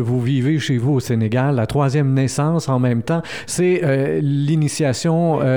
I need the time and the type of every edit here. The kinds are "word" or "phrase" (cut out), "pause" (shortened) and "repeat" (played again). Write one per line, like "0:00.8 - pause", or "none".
none